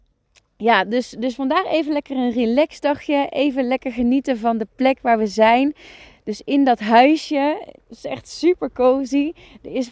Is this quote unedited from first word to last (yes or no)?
yes